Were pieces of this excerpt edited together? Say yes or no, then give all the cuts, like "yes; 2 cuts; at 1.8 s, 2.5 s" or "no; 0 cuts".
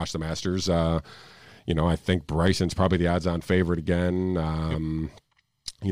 no; 0 cuts